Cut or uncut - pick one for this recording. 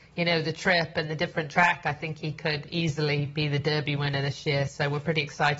uncut